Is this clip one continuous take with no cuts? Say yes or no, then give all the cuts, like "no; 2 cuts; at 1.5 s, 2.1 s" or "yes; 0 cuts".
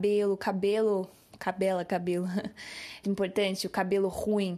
no; 1 cut; at 3.0 s